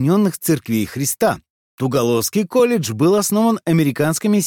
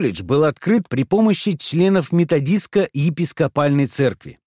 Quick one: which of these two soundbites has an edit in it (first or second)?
first